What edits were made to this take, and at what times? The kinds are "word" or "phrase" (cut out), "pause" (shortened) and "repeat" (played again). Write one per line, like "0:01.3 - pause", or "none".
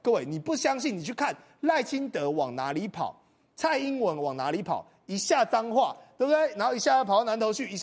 none